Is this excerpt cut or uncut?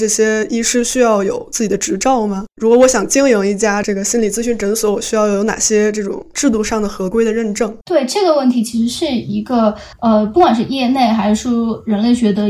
cut